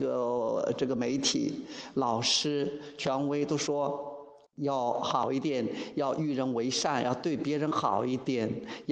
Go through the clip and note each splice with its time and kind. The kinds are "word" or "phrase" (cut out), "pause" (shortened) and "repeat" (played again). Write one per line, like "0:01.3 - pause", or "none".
0:04.5 - pause